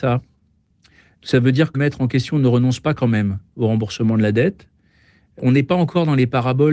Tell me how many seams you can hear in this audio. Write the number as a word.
one